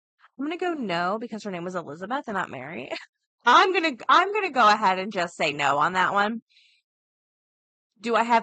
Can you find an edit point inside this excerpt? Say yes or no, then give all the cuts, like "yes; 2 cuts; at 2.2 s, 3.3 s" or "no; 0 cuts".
no; 0 cuts